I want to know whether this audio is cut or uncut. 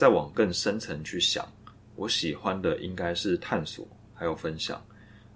uncut